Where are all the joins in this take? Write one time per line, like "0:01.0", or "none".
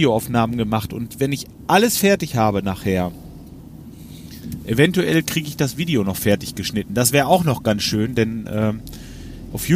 none